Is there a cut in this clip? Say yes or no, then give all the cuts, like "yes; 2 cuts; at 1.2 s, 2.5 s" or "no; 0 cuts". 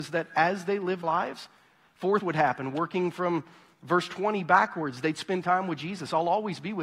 yes; 2 cuts; at 1.0 s, 2.2 s